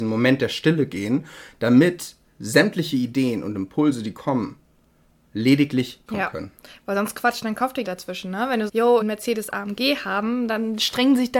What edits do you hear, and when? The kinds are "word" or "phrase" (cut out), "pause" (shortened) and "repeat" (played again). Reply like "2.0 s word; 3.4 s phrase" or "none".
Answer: 6.1 s phrase; 7.8 s phrase; 8.7 s word; 9.0 s phrase